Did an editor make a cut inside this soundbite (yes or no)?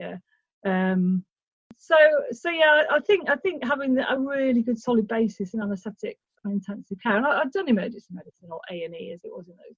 no